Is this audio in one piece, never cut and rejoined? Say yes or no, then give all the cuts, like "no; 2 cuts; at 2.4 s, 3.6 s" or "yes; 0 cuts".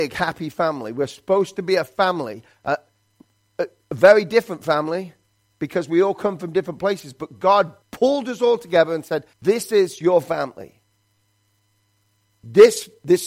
no; 2 cuts; at 7.8 s, 9.3 s